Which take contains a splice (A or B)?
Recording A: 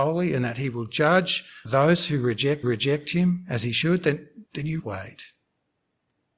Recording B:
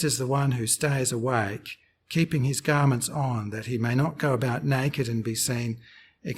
A